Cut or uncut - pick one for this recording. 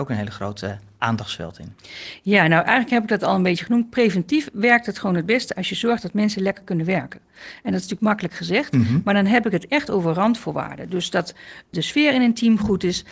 cut